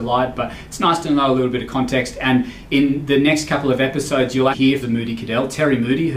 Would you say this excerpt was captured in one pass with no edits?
no; 2 cuts; at 4.5 s, 4.8 s

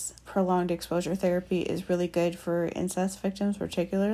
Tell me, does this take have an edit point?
no; 0 cuts

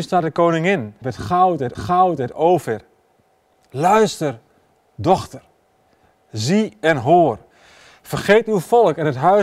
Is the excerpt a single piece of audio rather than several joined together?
no; 2 cuts; at 1.0 s, 1.7 s

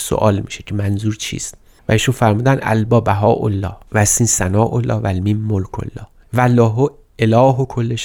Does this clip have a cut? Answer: no; 0 cuts

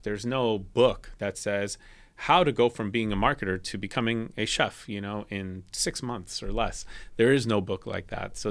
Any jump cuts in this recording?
no; 0 cuts

